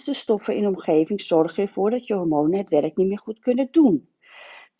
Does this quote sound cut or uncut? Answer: uncut